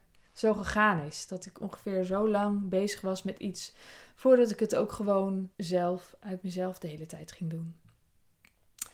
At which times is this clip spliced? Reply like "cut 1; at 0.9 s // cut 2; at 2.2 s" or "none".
cut 1; at 5.5 s